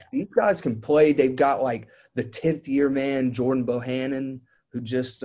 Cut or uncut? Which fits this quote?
uncut